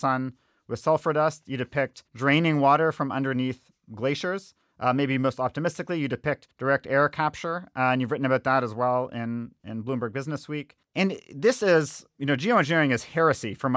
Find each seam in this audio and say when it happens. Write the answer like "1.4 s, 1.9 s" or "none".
2.1 s, 6.5 s, 10.8 s